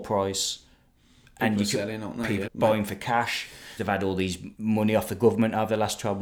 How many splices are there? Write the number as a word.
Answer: three